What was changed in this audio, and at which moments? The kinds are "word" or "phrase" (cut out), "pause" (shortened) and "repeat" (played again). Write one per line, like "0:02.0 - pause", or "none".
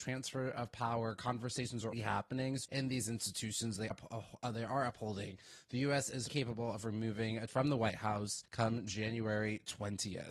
0:01.9 - word
0:02.6 - word
0:03.9 - word
0:06.3 - word
0:07.5 - phrase
0:08.5 - pause